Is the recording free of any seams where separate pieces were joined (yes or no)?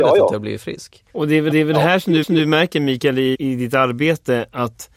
no